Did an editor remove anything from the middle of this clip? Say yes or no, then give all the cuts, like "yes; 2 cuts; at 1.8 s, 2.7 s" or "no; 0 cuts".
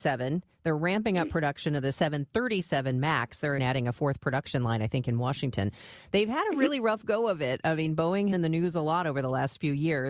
yes; 2 cuts; at 3.6 s, 8.3 s